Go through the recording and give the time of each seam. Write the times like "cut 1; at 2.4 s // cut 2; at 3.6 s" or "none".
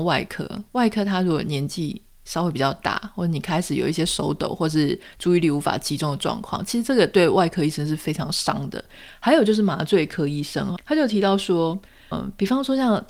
cut 1; at 10.8 s // cut 2; at 12.1 s